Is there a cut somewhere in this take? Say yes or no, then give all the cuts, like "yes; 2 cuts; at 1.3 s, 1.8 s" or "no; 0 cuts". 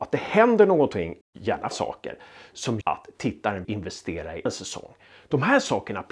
yes; 5 cuts; at 1.2 s, 1.7 s, 2.8 s, 3.6 s, 4.5 s